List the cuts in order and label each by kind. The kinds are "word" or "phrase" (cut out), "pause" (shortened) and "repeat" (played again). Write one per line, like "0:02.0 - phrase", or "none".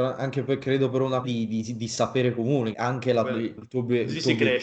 0:01.2 - word
0:02.7 - word
0:03.6 - word